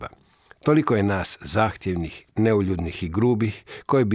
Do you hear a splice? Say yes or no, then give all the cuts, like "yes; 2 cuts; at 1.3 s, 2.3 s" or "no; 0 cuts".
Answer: yes; 1 cut; at 2.3 s